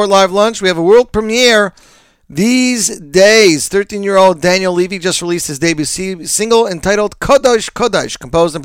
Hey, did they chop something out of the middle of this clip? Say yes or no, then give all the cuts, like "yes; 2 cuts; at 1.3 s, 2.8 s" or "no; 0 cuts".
no; 0 cuts